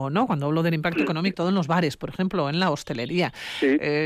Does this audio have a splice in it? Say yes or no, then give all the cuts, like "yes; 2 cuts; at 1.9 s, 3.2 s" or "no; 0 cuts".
yes; 1 cut; at 1.3 s